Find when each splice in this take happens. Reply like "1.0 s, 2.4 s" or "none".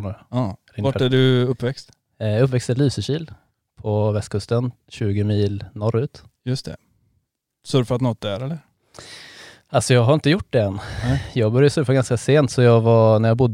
none